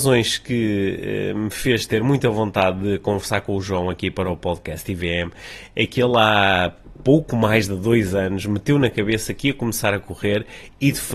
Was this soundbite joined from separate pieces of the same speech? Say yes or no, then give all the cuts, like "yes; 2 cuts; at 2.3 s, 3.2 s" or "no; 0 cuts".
no; 0 cuts